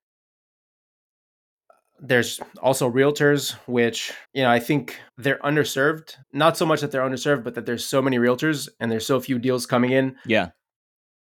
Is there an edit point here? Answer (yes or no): yes